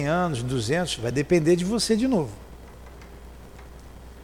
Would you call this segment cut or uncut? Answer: uncut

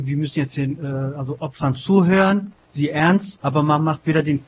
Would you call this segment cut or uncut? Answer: cut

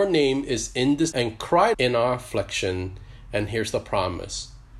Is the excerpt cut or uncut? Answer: cut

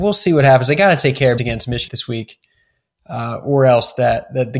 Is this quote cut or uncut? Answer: cut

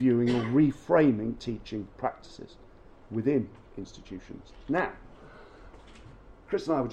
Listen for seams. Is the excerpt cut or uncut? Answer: uncut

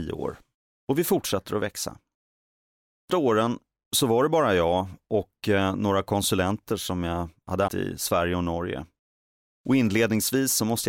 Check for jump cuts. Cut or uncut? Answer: cut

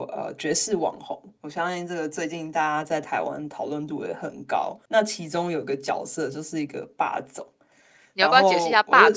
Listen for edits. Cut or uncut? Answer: cut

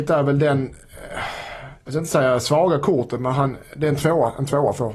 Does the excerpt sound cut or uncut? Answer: cut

